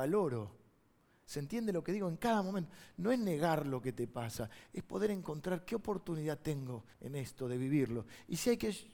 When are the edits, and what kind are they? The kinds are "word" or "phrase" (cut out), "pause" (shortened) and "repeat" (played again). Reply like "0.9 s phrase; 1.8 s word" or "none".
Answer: 6.9 s pause